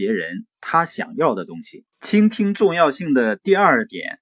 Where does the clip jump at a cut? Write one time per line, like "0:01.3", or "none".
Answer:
0:01.9